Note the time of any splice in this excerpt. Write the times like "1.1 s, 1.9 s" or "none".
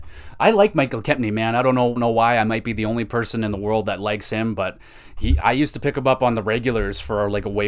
2.0 s, 5.4 s